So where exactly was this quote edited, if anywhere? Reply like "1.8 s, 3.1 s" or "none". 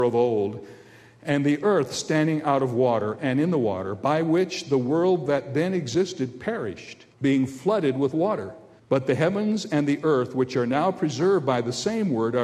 7.1 s, 8.8 s